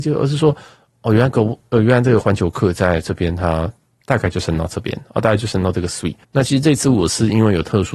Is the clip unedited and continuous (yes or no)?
no